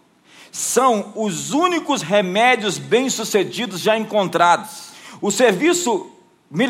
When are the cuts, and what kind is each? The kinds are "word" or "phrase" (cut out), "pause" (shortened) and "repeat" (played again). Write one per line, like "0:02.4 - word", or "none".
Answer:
none